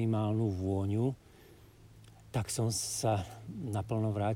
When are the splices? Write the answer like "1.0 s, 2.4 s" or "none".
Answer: none